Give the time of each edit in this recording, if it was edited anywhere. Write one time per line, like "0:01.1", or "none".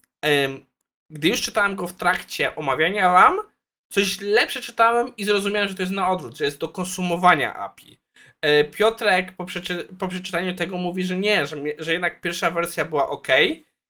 none